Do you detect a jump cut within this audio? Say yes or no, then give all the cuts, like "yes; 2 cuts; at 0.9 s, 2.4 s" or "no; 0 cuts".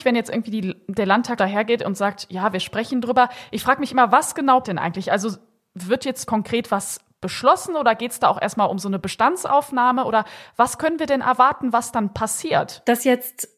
yes; 3 cuts; at 1.4 s, 4.6 s, 6.3 s